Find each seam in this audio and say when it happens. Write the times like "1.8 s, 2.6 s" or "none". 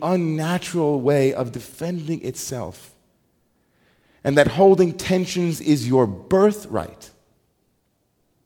none

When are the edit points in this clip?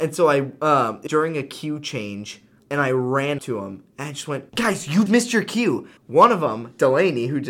1.1 s, 2.6 s, 3.4 s, 4.5 s, 5.1 s, 6.0 s

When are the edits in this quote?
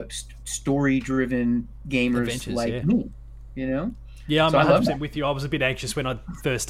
none

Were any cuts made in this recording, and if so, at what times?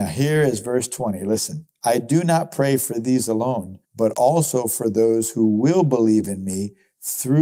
1.7 s, 3.8 s

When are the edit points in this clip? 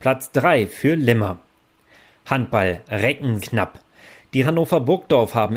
3.4 s, 4.4 s

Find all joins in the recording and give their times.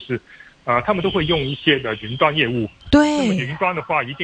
2.8 s

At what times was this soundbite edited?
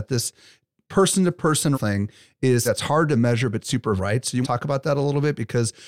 1.7 s, 2.6 s, 4.0 s, 4.4 s

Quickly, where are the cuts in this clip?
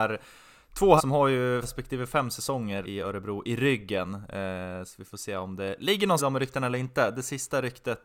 1.0 s, 1.6 s, 2.8 s, 6.2 s

